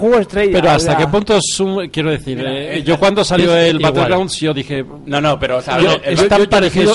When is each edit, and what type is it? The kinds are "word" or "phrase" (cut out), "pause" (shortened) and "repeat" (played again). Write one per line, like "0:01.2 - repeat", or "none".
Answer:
none